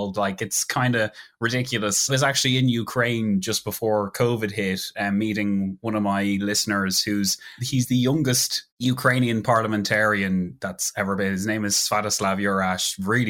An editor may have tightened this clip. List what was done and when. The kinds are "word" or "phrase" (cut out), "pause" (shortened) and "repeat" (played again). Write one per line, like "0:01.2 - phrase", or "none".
0:02.1 - phrase
0:08.7 - pause